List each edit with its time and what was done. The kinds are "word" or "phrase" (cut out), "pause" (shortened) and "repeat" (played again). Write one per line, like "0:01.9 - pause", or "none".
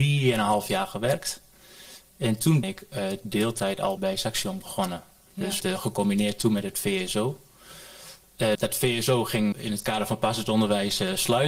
0:02.6 - word
0:04.0 - word
0:05.6 - word
0:08.5 - word
0:09.5 - word